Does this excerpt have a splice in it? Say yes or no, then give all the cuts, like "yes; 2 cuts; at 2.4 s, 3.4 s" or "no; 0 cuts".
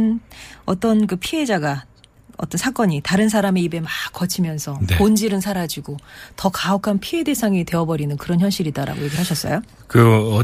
no; 0 cuts